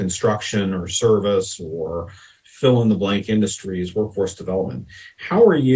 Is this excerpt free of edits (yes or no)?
yes